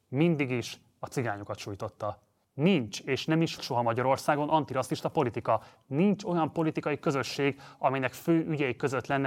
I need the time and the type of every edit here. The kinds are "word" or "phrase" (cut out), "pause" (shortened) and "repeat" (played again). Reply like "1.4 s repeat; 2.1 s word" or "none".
2.4 s pause; 3.6 s word